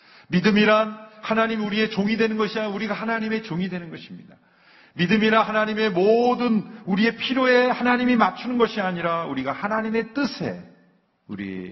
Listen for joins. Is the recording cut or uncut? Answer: uncut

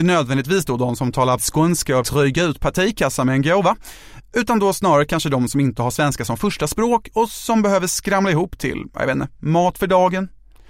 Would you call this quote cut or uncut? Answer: cut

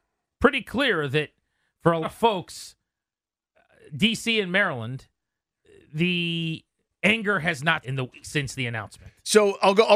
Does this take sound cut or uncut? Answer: cut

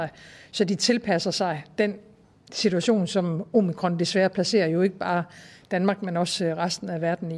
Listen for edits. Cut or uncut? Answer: uncut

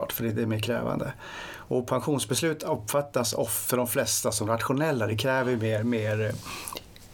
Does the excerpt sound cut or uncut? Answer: uncut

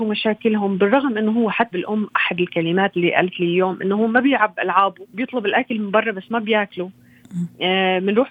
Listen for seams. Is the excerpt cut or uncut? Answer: cut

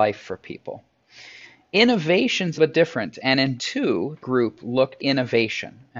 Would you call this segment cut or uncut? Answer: cut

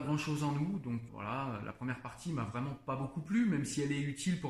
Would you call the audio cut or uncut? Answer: cut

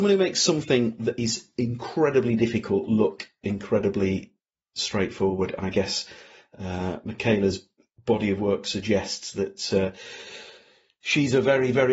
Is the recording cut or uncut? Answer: uncut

